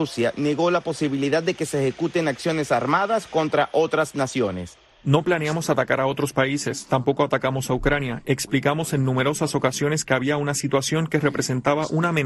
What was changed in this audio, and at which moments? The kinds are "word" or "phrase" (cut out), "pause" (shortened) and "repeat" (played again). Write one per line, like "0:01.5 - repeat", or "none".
none